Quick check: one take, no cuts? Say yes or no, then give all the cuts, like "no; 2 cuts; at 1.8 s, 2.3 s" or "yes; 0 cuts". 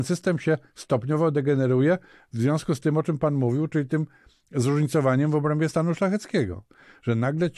yes; 0 cuts